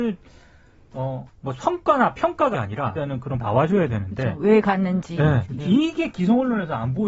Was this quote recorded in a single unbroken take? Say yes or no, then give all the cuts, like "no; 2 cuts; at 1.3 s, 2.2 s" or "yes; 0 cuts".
no; 4 cuts; at 1.4 s, 2.5 s, 2.9 s, 3.4 s